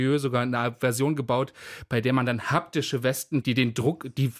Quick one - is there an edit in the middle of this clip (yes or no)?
yes